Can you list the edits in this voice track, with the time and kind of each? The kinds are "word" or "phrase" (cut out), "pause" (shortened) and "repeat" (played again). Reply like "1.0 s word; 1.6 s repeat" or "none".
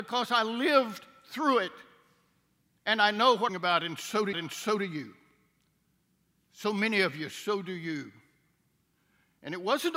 3.5 s phrase; 4.3 s repeat